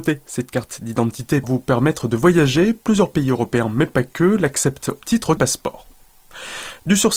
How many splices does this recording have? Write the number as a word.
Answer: three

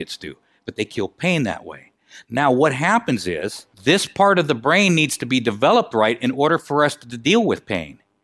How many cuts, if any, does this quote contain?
one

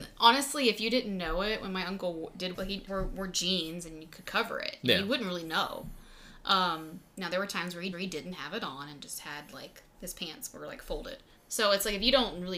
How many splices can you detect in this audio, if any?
four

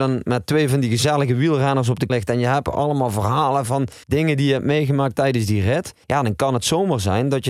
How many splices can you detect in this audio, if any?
three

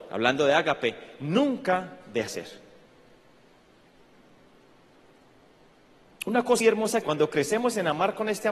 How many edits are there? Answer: three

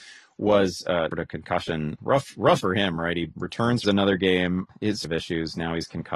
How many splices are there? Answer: five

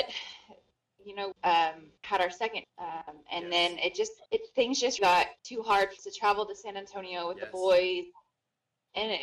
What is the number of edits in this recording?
seven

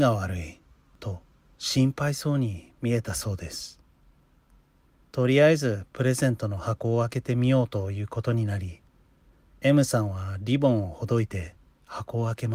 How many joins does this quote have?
zero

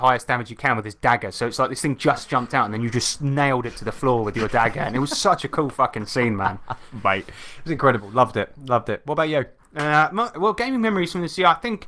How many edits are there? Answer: one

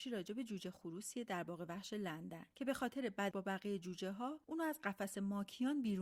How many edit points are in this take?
three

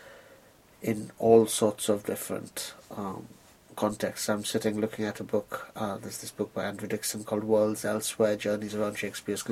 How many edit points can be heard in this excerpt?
zero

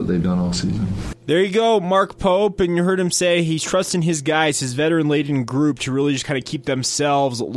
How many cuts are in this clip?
zero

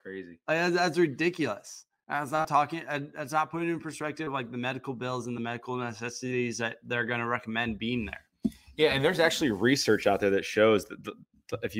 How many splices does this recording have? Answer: zero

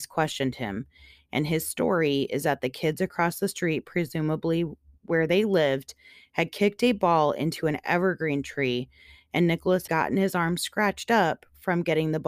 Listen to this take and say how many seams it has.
one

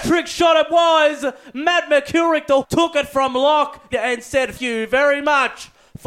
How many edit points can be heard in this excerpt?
three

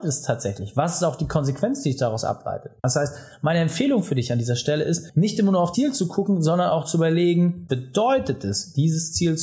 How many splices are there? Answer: two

